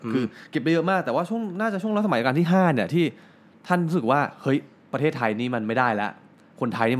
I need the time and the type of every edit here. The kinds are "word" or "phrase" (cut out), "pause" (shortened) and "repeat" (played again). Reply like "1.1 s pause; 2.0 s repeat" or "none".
none